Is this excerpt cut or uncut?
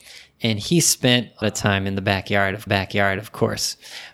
cut